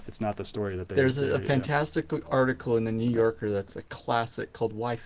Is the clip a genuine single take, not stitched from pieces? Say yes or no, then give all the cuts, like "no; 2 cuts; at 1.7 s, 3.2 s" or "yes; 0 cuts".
yes; 0 cuts